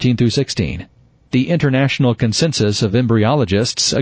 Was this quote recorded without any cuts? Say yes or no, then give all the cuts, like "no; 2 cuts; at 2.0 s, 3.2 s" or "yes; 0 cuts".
yes; 0 cuts